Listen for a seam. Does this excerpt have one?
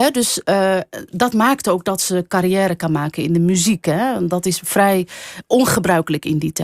no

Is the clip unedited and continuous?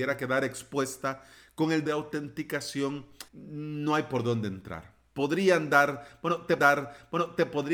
no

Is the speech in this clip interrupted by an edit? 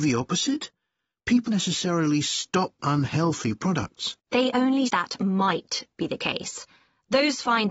yes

